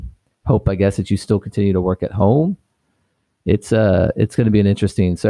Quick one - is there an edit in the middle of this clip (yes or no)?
no